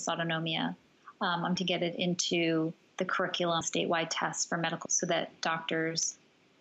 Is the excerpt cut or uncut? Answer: cut